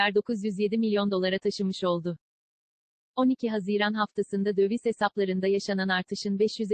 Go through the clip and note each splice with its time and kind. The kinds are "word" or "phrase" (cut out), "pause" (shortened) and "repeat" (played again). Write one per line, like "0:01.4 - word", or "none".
none

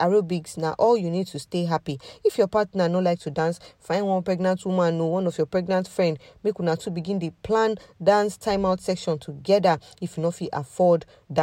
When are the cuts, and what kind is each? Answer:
none

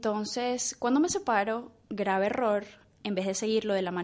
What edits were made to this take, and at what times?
none

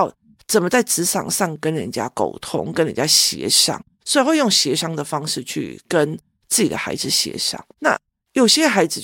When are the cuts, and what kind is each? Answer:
0:03.9 - pause
0:07.7 - pause

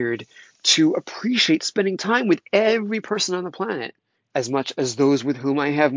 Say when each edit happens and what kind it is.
0:04.1 - pause

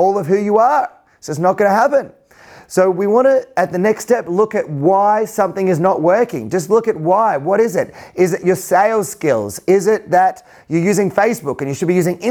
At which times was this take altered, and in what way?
none

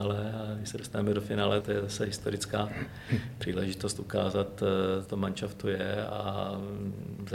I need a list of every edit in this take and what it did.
0:01.6 - word
0:05.1 - phrase

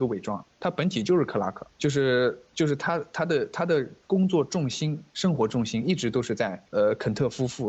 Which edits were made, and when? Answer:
0:01.7 - pause
0:04.0 - pause
0:06.7 - pause

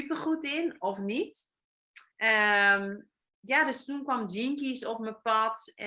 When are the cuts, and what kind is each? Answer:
0:02.1 - pause

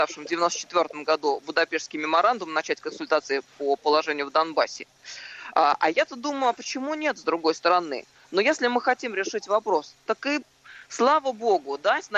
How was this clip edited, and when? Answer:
none

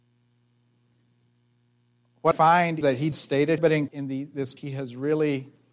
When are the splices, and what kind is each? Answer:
0:02.3 - word
0:02.8 - word
0:03.1 - word
0:03.6 - word
0:03.9 - word
0:04.6 - word

